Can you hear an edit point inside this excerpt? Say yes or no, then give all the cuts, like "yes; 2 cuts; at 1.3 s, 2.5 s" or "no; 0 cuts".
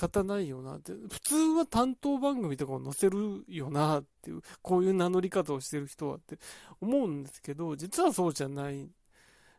no; 0 cuts